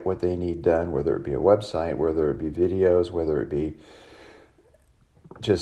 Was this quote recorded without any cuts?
yes; 0 cuts

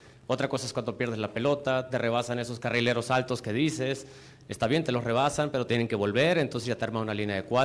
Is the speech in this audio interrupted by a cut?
no; 0 cuts

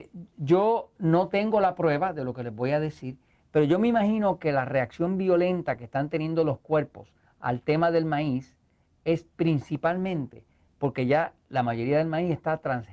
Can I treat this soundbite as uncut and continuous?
yes; 0 cuts

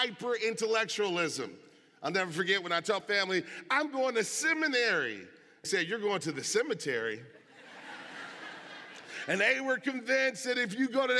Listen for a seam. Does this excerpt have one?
yes; 2 cuts; at 3.0 s, 5.6 s

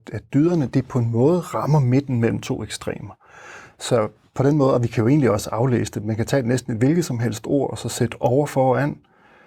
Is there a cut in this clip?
no; 0 cuts

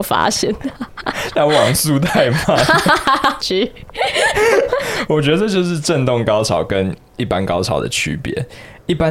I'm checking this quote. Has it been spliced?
yes; 1 cut; at 3.4 s

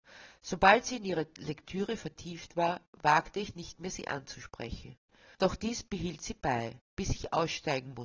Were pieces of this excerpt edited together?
yes; 2 cuts; at 5.3 s, 6.9 s

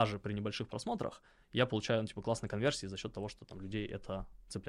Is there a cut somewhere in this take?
no; 0 cuts

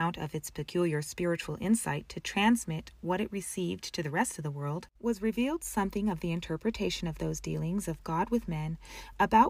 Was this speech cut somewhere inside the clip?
yes; 1 cut; at 5.0 s

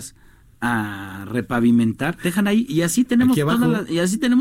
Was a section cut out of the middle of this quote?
yes; 2 cuts; at 2.2 s, 2.7 s

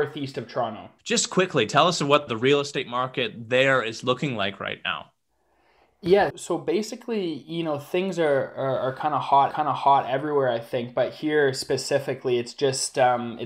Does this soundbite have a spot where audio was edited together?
yes; 4 cuts; at 1.0 s, 2.3 s, 6.3 s, 9.5 s

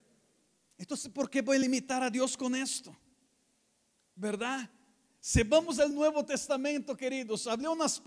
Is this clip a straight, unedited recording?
yes; 0 cuts

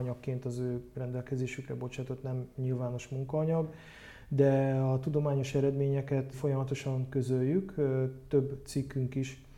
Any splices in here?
yes; 1 cut; at 6.3 s

